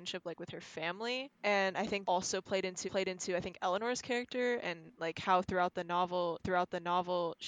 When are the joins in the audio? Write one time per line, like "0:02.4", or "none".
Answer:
0:01.4
0:02.0
0:02.9
0:06.4